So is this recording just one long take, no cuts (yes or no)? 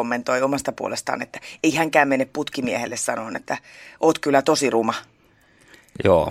yes